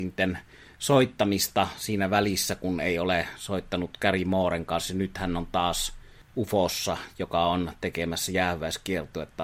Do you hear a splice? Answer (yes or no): no